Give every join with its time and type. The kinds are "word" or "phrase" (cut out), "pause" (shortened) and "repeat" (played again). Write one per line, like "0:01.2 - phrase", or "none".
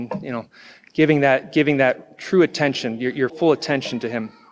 0:03.3 - word